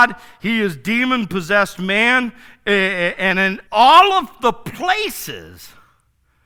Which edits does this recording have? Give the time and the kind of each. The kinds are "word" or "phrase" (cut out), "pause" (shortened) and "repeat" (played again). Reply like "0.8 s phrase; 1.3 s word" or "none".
3.7 s pause